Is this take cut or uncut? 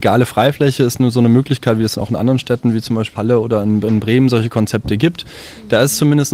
cut